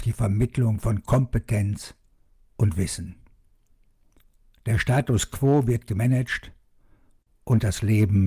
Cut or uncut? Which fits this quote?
uncut